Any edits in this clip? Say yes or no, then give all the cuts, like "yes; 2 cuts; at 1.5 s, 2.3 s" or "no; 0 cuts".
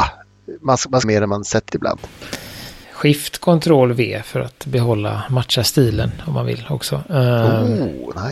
yes; 3 cuts; at 1.0 s, 1.7 s, 2.8 s